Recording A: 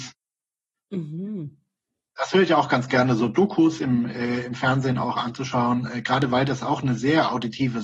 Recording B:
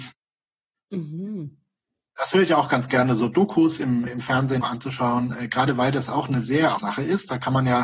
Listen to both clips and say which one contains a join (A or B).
B